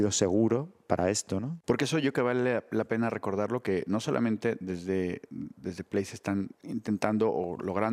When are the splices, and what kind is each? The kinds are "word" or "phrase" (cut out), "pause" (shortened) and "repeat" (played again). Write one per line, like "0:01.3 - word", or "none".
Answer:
0:01.6 - pause
0:06.5 - pause